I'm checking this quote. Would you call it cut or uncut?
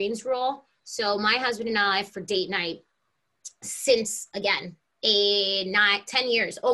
uncut